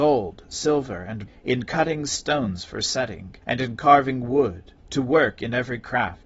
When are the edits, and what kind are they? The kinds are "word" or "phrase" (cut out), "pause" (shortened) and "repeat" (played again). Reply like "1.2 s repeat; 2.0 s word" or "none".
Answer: 1.3 s word; 3.4 s pause; 4.8 s pause

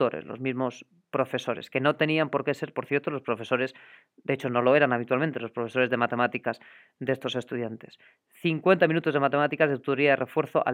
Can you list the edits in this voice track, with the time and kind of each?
none

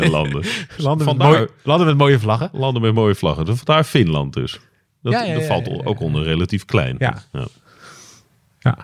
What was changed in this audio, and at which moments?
none

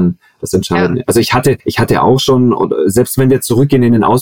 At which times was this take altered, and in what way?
1.6 s pause

